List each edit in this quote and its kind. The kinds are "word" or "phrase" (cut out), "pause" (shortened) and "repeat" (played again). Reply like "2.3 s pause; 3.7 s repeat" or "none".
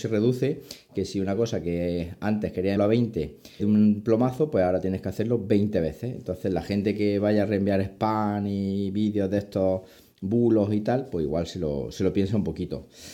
2.8 s word; 3.6 s word